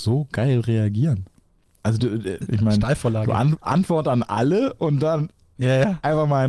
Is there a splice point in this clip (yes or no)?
no